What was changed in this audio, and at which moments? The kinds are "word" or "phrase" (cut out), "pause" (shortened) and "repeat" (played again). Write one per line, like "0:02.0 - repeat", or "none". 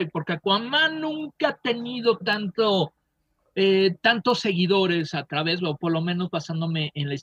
none